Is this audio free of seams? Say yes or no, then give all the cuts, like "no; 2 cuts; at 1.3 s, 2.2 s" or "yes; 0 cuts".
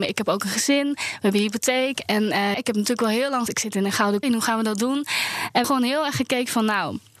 no; 4 cuts; at 2.5 s, 3.5 s, 4.2 s, 5.6 s